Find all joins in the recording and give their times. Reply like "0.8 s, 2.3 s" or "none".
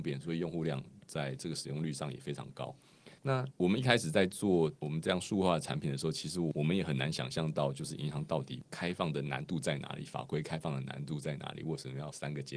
3.2 s